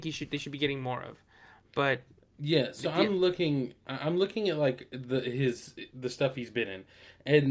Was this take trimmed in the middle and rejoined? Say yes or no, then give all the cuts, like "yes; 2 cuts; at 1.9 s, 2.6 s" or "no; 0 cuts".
no; 0 cuts